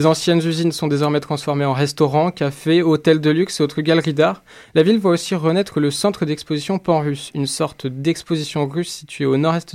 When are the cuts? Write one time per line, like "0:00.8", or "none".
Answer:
none